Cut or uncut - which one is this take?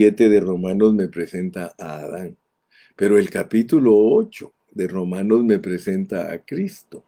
uncut